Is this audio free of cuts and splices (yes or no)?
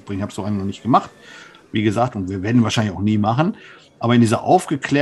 yes